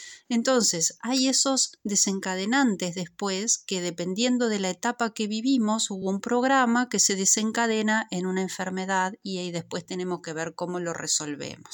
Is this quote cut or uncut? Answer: uncut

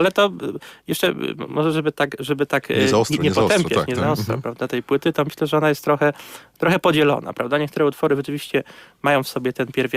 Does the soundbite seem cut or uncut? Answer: uncut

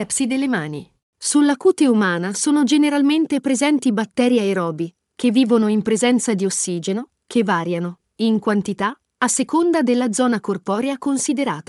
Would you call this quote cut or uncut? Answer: uncut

